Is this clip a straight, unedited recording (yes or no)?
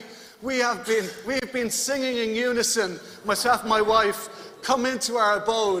yes